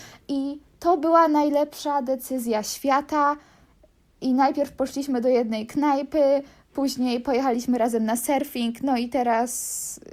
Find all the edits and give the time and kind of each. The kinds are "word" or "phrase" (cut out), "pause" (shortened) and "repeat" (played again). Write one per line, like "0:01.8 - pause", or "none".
none